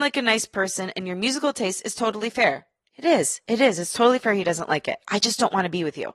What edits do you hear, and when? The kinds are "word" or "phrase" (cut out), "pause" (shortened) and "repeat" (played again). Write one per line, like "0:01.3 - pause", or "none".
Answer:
none